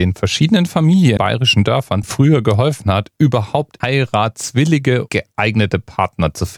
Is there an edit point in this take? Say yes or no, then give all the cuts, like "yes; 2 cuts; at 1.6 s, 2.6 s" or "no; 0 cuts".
yes; 4 cuts; at 1.2 s, 2.0 s, 3.8 s, 5.1 s